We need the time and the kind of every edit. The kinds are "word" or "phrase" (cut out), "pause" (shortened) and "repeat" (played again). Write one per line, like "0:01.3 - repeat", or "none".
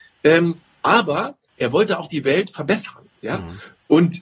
0:03.1 - pause